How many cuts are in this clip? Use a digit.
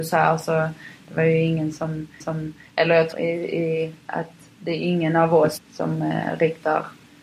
3